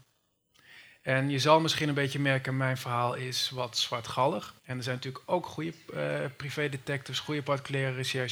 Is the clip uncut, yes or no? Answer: no